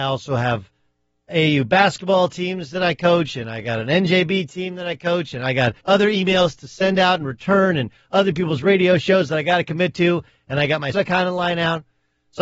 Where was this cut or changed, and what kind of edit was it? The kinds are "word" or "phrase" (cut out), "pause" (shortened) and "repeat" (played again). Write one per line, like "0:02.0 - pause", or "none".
0:01.3 - word
0:05.8 - pause
0:10.9 - word

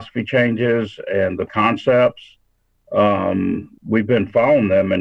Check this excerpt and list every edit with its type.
0:01.5 - word
0:03.8 - word

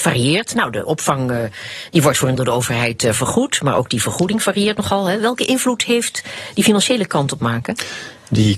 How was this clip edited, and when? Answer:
0:02.4 - word
0:07.4 - phrase

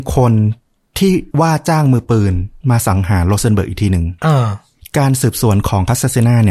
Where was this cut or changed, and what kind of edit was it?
0:01.3 - pause
0:02.6 - pause
0:04.2 - pause
0:04.8 - pause

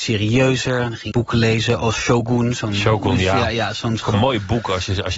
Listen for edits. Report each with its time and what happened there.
0:01.1 - word
0:01.9 - word
0:04.0 - phrase

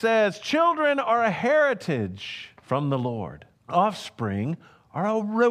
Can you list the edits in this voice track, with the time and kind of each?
0:02.6 - pause
0:03.6 - pause

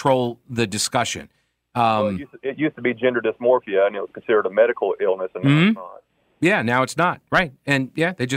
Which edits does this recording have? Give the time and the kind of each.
none

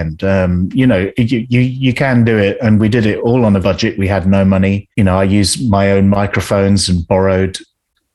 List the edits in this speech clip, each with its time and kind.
0:03.6 - phrase

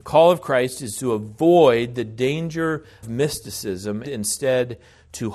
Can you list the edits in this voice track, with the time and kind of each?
0:03.0 - word
0:04.0 - word

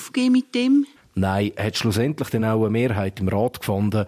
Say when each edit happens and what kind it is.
none

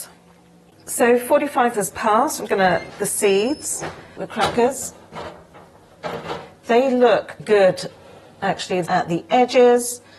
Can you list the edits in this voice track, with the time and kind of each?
0:01.7 - word
0:02.5 - word
0:02.9 - word
0:04.2 - word
0:07.4 - word
0:08.9 - phrase

